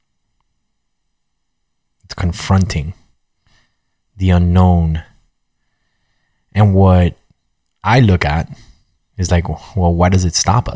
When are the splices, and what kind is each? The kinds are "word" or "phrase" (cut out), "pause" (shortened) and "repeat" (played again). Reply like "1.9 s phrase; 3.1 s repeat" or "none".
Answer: none